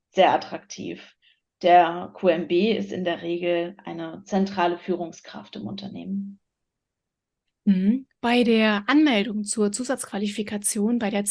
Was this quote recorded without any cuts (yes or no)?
yes